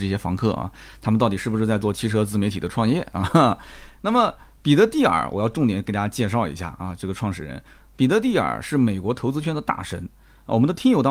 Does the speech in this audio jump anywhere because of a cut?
no; 0 cuts

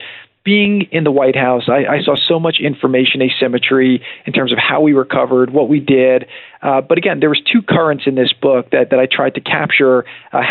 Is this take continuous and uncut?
yes; 0 cuts

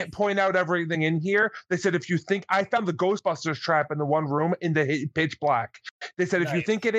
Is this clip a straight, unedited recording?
yes; 0 cuts

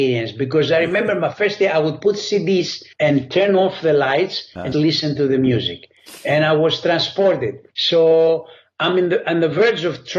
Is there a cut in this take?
yes; 3 cuts; at 2.9 s, 4.7 s, 7.7 s

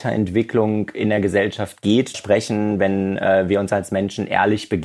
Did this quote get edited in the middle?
yes; 1 cut; at 2.1 s

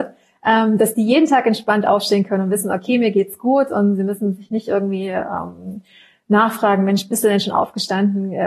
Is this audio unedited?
yes; 0 cuts

